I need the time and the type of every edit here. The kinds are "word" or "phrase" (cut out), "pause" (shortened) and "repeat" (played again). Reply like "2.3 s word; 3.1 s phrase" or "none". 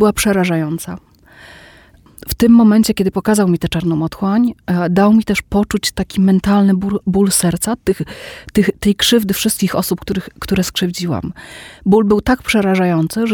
none